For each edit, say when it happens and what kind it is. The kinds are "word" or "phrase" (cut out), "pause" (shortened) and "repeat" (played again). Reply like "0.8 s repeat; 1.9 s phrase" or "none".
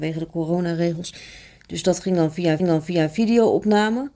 2.6 s repeat